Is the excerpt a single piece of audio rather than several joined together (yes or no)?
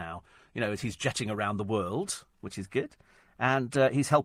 yes